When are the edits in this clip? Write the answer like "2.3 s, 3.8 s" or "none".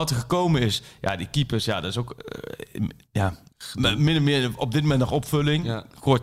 none